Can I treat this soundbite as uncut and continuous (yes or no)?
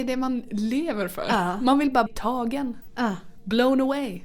no